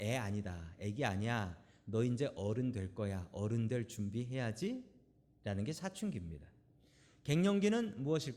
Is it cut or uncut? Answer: uncut